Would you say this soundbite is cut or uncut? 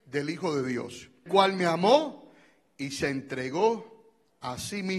cut